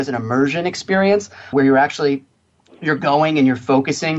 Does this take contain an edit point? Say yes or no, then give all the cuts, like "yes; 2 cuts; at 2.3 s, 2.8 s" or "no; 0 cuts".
yes; 1 cut; at 1.5 s